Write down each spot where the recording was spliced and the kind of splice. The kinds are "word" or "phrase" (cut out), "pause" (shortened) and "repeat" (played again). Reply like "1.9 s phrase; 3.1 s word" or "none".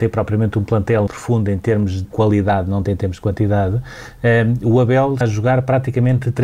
1.1 s word; 2.0 s word; 2.8 s word; 5.2 s word